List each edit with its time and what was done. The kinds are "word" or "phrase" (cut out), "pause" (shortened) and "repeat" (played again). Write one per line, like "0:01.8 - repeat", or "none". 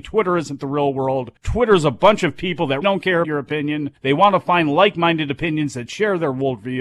0:01.4 - pause
0:02.8 - word
0:03.2 - word
0:04.0 - pause